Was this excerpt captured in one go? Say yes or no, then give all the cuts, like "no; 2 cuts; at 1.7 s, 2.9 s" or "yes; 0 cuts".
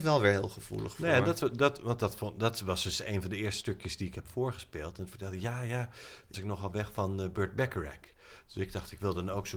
no; 1 cut; at 6.3 s